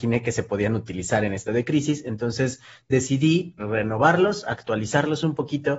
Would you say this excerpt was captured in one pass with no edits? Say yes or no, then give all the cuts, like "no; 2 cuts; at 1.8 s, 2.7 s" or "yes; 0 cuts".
no; 2 cuts; at 1.5 s, 3.6 s